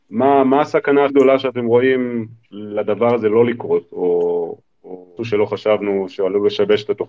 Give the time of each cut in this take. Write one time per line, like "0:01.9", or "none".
0:01.1
0:02.4
0:05.2